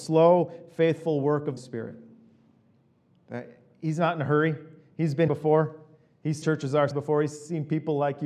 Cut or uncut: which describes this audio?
cut